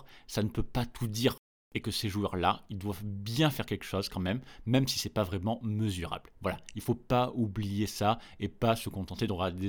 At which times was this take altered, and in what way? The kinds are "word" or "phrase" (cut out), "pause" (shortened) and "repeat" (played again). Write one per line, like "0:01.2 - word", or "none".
none